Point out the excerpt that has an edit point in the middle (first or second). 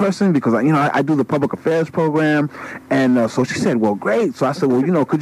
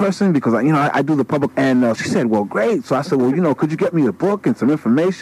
second